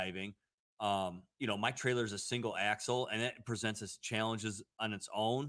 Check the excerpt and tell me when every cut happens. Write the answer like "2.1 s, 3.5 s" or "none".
none